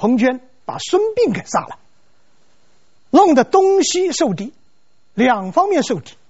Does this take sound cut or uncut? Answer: uncut